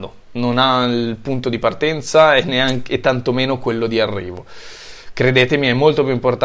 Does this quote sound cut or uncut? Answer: uncut